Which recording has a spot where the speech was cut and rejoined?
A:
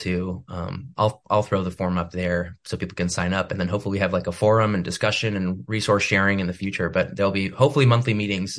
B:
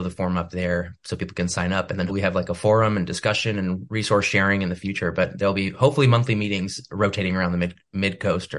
B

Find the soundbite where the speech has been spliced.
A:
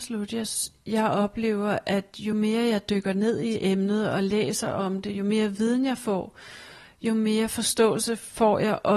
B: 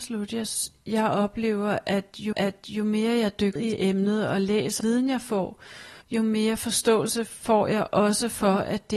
B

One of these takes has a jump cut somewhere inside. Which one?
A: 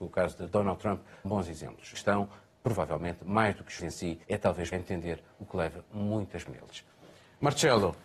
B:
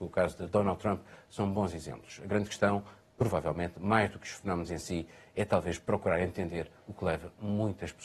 A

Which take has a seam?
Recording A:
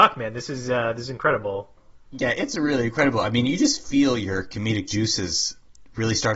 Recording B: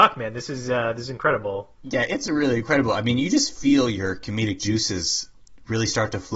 B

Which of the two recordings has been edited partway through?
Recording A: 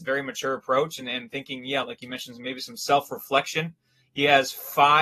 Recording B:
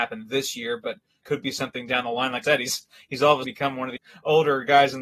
B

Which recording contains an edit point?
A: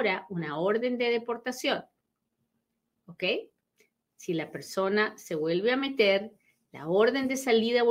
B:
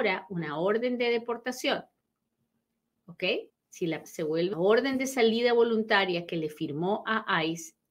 B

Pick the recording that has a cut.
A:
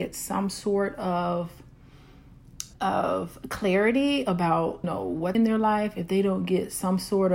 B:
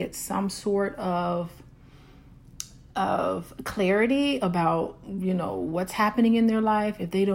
A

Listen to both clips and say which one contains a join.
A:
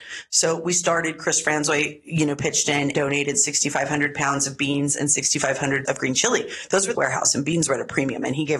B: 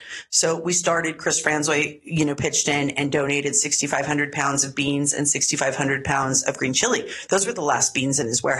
A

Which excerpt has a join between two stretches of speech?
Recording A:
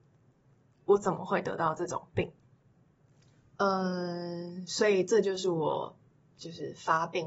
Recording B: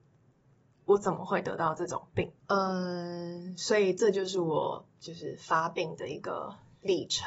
B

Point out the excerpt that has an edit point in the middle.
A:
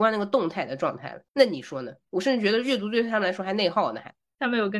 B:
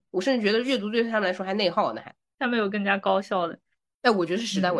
A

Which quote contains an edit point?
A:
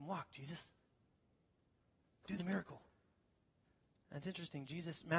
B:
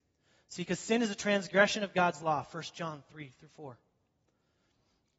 A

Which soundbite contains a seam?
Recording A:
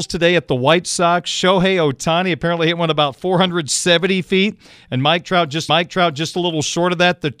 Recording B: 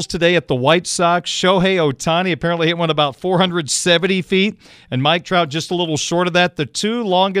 A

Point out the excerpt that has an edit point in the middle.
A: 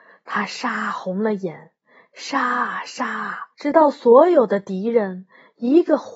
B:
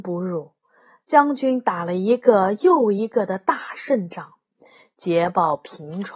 A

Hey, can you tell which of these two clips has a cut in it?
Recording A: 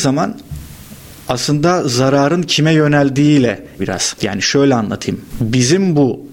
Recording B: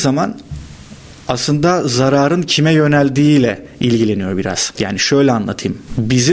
A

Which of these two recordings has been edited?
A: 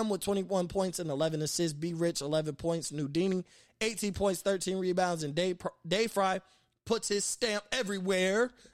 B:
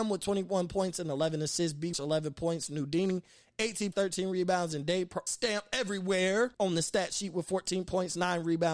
B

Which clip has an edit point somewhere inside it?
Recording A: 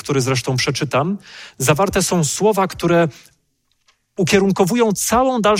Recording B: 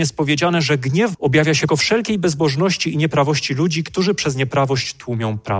B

